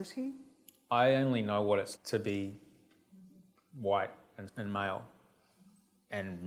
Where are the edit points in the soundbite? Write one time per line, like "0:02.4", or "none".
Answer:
0:02.0
0:04.5